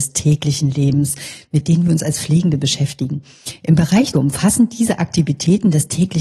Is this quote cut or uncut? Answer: cut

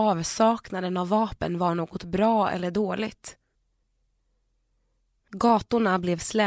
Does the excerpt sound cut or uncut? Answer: uncut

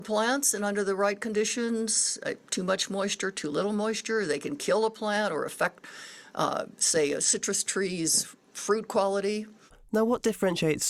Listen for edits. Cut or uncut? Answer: uncut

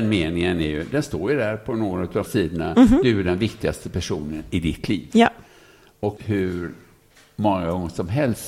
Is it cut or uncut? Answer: cut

